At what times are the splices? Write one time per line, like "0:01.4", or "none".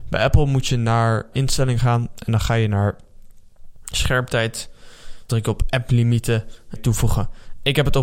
0:01.3
0:05.3
0:06.7